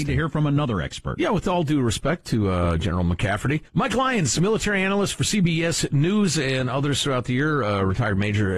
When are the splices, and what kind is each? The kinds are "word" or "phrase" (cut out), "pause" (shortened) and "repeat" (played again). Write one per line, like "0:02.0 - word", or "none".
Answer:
0:03.7 - pause